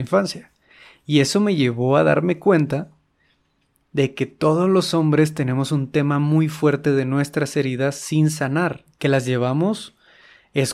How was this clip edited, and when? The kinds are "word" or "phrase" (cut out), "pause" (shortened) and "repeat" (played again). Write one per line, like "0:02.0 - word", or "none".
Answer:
none